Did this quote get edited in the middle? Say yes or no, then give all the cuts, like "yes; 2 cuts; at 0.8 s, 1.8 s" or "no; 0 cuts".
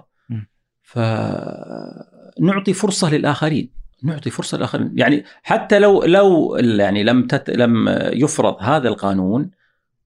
yes; 1 cut; at 3.9 s